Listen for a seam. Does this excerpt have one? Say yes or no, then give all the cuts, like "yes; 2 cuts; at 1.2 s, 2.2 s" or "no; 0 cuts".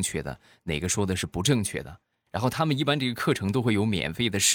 no; 0 cuts